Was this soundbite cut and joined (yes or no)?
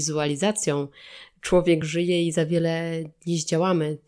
no